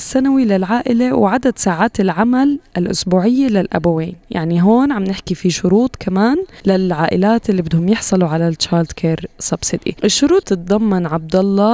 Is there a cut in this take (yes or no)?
no